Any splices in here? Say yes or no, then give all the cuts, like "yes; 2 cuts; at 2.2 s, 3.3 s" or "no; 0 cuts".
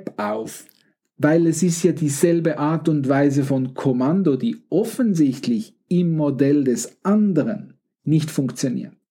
no; 0 cuts